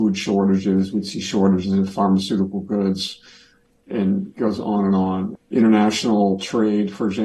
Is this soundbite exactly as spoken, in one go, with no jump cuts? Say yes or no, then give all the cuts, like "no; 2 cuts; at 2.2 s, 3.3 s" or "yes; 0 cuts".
yes; 0 cuts